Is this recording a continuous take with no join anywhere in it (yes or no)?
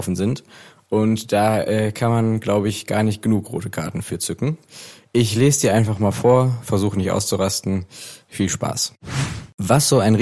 yes